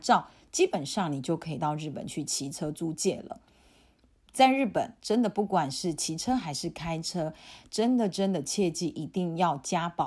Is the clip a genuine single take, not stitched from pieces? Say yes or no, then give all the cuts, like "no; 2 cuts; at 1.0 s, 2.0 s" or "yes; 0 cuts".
yes; 0 cuts